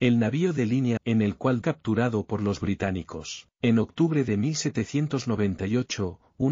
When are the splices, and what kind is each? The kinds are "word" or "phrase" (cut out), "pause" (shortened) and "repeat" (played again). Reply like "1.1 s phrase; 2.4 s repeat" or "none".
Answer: 1.0 s word; 1.6 s phrase; 3.5 s pause